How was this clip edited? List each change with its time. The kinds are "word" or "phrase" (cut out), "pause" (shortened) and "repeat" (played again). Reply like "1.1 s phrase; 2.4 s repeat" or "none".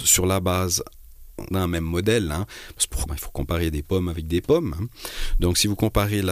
1.5 s word; 3.1 s word